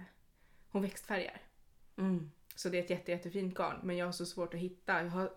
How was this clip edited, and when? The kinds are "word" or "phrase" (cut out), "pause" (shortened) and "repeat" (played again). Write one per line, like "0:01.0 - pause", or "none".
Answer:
none